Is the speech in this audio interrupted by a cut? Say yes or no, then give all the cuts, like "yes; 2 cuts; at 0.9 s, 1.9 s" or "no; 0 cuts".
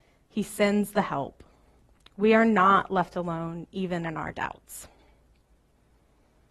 no; 0 cuts